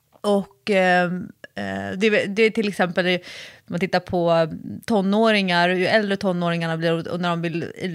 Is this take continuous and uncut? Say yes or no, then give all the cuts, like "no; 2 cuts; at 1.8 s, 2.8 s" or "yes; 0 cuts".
yes; 0 cuts